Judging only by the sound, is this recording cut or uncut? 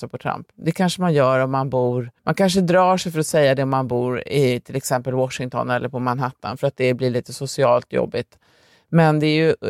cut